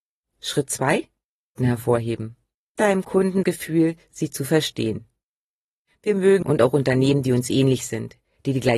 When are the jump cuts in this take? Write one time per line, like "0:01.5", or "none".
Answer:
0:01.6
0:02.8
0:03.4
0:06.4